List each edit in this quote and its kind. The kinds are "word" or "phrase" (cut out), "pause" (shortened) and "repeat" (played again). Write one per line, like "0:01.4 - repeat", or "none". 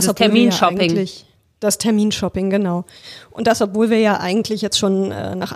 none